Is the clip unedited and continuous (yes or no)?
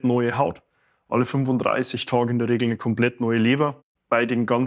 yes